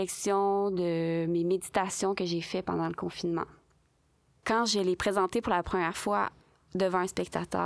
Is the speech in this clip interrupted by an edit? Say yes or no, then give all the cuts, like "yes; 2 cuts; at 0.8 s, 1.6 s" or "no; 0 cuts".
no; 0 cuts